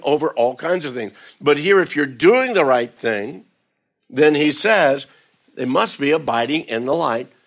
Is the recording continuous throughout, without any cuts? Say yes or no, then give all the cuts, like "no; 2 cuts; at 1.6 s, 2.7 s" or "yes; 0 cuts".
yes; 0 cuts